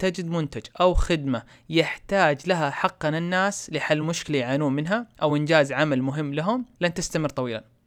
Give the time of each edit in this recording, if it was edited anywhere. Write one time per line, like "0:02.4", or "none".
none